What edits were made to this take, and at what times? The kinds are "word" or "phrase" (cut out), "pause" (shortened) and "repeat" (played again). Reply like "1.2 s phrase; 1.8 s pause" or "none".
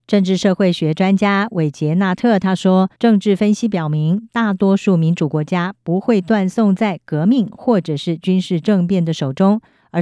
3.0 s pause